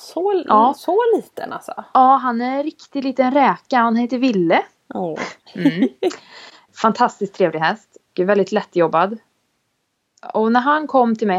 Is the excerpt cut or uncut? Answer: cut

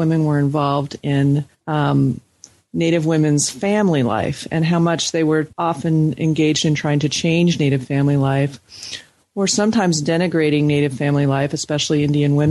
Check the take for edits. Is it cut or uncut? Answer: cut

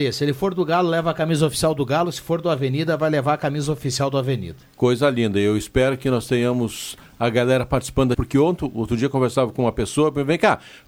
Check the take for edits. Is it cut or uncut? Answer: cut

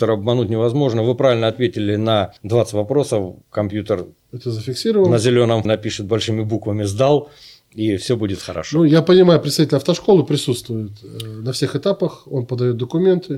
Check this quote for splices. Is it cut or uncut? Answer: cut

